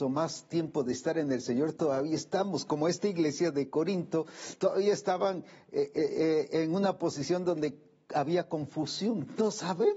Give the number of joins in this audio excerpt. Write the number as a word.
zero